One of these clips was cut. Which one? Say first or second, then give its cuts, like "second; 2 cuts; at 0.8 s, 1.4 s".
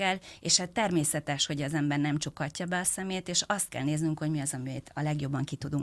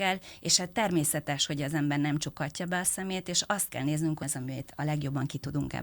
second; 1 cut; at 4.2 s